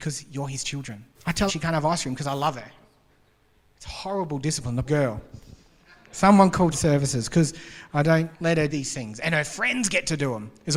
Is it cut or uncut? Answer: cut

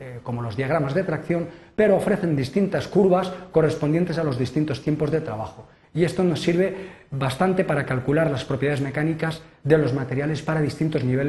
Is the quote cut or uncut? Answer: uncut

